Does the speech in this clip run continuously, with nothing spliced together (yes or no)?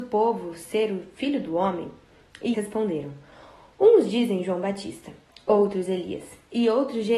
no